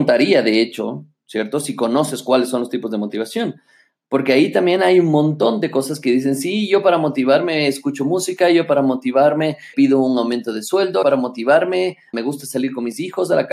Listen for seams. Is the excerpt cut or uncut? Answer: cut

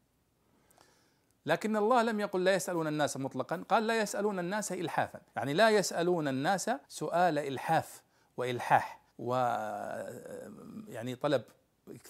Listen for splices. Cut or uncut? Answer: cut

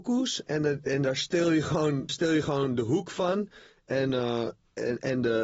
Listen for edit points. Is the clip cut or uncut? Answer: cut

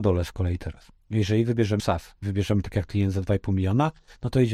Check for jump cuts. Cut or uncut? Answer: cut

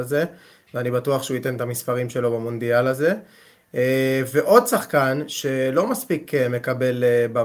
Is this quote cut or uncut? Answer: uncut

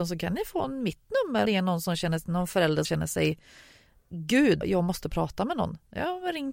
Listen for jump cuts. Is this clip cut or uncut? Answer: cut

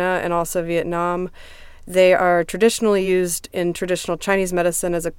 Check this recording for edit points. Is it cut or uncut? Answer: uncut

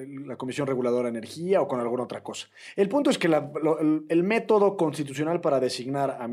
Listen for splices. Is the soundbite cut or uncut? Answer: uncut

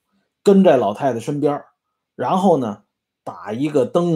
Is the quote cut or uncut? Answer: uncut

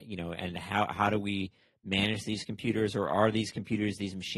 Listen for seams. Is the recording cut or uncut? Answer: uncut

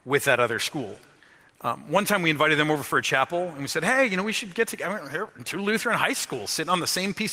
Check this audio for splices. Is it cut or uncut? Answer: cut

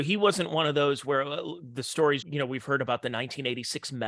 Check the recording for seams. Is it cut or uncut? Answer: cut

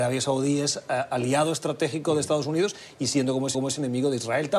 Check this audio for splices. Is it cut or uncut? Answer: cut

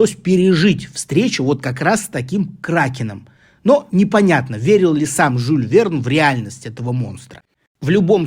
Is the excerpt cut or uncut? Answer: uncut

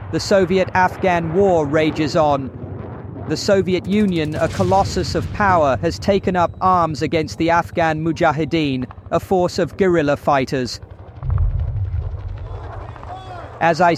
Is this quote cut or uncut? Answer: uncut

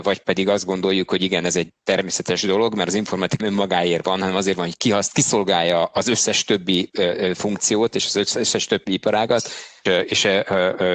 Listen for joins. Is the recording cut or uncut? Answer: cut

